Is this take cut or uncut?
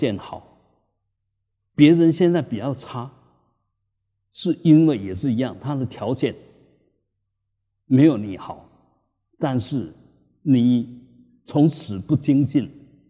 uncut